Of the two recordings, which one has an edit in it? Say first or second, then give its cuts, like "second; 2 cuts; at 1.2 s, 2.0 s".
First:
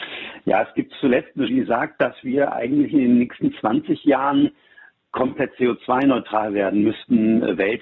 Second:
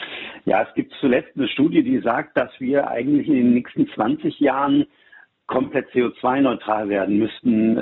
first; 1 cut; at 1.5 s